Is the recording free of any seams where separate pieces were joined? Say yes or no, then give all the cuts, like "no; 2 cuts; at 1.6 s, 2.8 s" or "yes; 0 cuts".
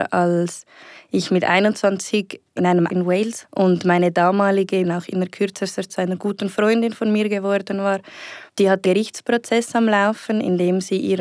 no; 6 cuts; at 2.9 s, 3.4 s, 4.8 s, 5.9 s, 8.5 s, 8.8 s